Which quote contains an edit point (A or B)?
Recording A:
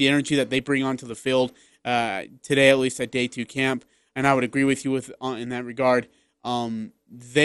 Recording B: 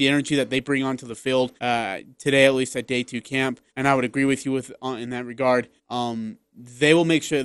B